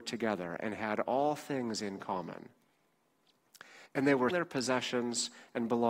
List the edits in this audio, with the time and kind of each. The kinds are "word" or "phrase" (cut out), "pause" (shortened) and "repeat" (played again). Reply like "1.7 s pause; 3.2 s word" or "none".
3.9 s pause; 4.3 s word